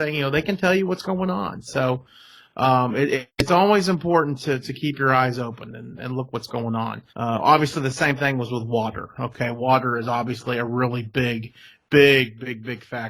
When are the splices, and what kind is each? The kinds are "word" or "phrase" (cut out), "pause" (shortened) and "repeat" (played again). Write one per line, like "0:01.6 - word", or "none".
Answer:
0:07.1 - pause

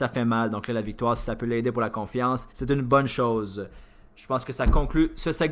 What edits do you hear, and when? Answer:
0:02.5 - pause

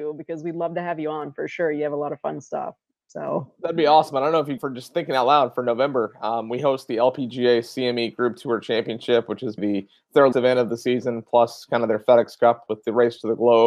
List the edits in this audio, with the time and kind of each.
0:04.6 - word
0:09.6 - word
0:10.3 - word

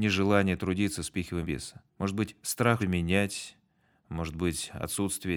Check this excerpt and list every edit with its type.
0:01.4 - word
0:01.9 - pause
0:02.8 - word

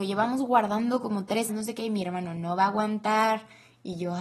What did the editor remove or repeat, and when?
0:01.5 - word

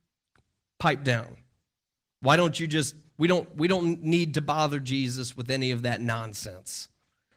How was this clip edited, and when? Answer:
none

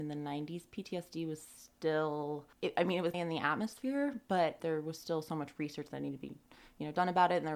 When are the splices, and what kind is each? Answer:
0:02.5 - pause
0:03.1 - word
0:04.6 - word

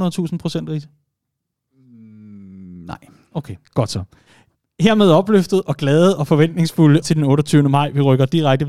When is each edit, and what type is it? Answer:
0:03.7 - pause
0:07.0 - word

